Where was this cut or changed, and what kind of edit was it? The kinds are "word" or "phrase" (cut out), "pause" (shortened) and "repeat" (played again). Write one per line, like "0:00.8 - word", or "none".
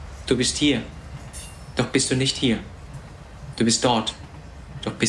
none